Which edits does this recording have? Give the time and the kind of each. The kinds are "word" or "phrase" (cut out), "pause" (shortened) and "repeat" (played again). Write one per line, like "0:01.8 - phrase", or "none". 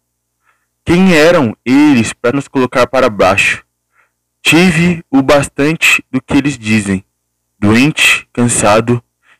0:02.3 - word